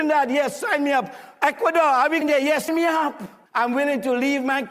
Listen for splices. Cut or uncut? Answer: cut